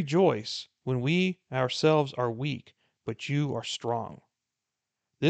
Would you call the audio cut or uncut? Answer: uncut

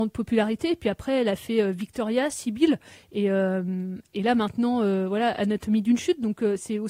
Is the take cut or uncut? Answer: uncut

